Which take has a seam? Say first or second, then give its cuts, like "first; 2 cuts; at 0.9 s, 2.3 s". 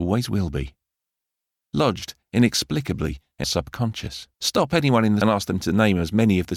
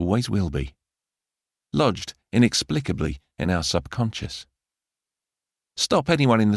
first; 3 cuts; at 3.4 s, 4.3 s, 5.2 s